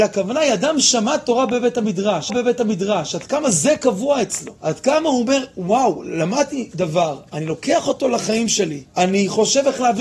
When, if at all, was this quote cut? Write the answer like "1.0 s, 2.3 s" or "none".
2.3 s, 4.6 s, 8.9 s

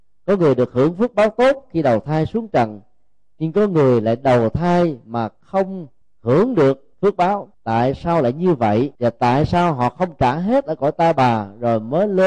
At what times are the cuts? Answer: 6.0 s, 6.9 s, 7.5 s, 8.9 s

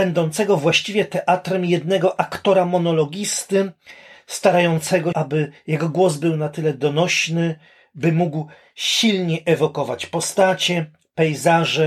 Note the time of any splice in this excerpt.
5.1 s

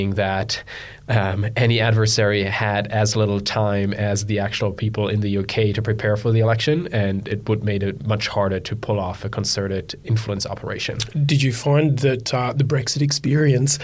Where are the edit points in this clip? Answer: none

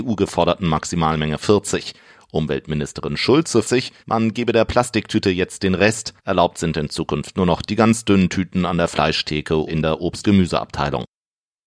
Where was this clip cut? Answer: 1.4 s, 3.6 s, 4.0 s, 6.2 s, 9.7 s, 10.2 s

